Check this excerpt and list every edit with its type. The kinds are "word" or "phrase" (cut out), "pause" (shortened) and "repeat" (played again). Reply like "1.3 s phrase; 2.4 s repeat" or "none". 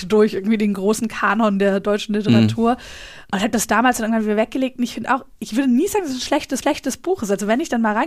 6.6 s repeat